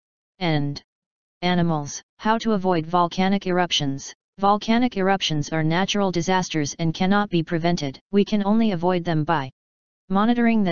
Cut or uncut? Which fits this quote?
cut